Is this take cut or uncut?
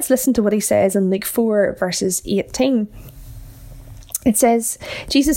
uncut